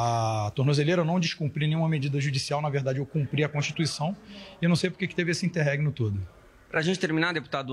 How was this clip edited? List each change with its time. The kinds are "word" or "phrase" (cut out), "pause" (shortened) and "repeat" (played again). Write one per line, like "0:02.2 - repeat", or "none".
none